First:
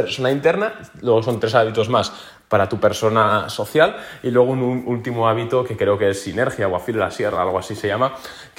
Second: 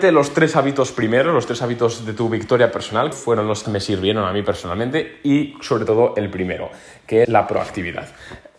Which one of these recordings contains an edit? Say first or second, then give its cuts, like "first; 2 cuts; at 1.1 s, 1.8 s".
second; 3 cuts; at 3.1 s, 3.6 s, 7.2 s